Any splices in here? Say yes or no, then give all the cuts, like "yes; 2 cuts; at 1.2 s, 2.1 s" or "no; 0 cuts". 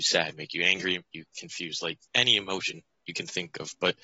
yes; 2 cuts; at 1.1 s, 2.1 s